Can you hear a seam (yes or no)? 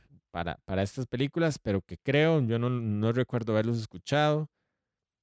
no